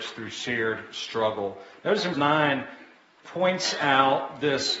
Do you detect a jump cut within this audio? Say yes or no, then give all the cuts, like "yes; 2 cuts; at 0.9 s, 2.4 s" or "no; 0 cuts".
yes; 2 cuts; at 2.1 s, 3.2 s